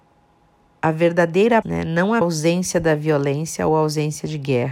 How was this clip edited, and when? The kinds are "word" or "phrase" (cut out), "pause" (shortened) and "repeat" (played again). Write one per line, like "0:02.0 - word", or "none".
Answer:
0:01.6 - word
0:02.2 - word